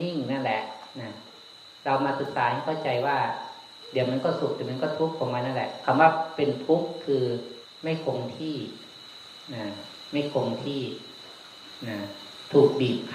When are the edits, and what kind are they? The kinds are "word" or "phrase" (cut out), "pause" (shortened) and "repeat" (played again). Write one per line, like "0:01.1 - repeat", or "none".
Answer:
0:07.6 - pause

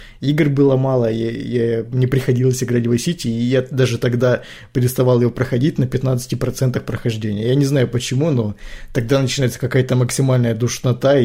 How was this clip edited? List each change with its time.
none

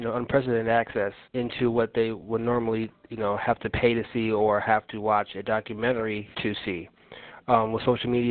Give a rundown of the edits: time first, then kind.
0:01.3 - pause
0:06.3 - pause

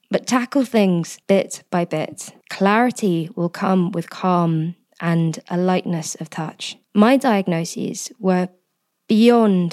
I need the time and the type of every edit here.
0:01.2 - pause
0:02.4 - pause
0:06.8 - pause

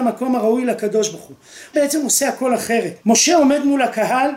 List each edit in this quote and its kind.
0:01.7 - word
0:03.0 - pause

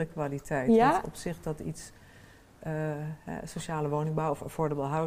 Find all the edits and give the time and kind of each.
none

